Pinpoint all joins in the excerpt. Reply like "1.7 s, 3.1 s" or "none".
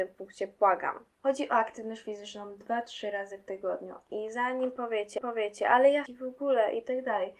5.2 s, 6.1 s